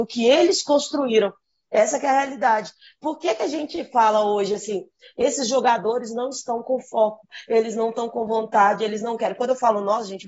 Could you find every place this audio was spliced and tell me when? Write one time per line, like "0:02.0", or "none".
none